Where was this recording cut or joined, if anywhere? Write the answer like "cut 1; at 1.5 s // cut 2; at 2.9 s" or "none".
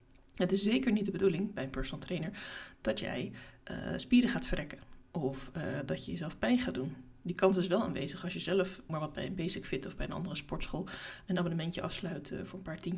cut 1; at 8.9 s